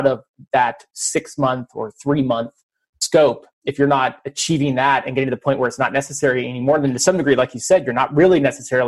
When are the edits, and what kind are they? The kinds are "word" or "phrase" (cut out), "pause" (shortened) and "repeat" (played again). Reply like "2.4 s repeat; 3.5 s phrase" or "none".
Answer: none